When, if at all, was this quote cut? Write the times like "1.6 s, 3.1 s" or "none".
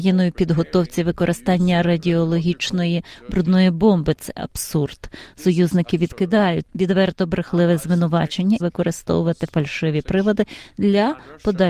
8.6 s